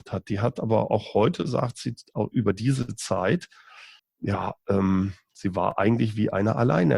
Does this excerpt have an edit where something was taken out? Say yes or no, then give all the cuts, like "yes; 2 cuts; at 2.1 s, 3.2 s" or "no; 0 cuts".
yes; 1 cut; at 4.0 s